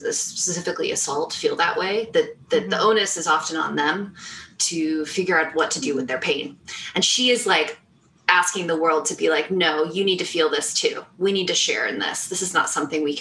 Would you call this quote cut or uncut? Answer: uncut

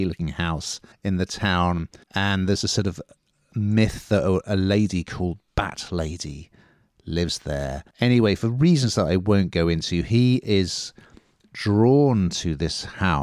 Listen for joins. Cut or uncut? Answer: cut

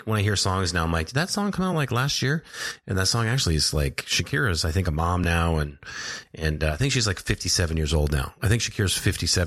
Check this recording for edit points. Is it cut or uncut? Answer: uncut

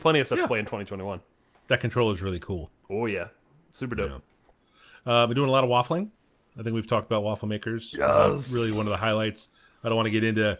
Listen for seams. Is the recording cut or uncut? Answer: uncut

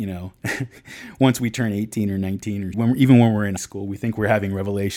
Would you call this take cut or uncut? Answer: cut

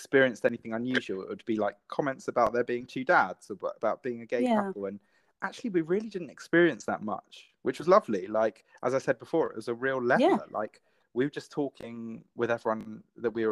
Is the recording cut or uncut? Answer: uncut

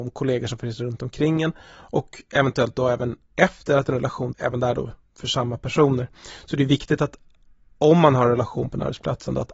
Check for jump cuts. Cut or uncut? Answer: cut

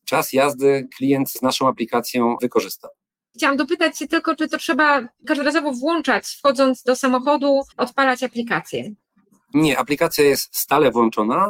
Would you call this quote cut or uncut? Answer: cut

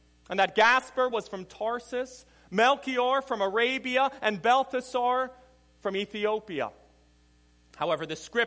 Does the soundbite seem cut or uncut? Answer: uncut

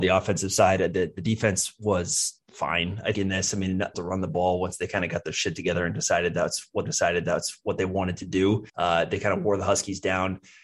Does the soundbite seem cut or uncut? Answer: cut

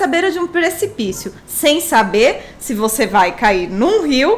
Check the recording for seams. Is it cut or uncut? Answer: cut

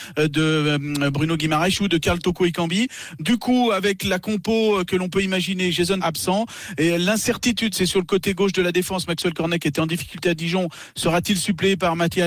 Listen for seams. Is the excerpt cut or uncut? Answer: cut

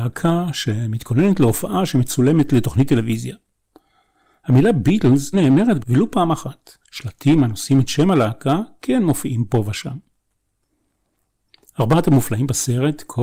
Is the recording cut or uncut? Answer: cut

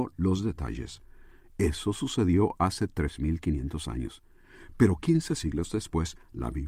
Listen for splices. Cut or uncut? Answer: uncut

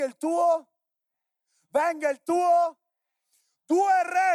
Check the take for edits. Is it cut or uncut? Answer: uncut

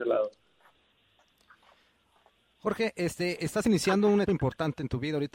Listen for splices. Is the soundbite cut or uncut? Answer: cut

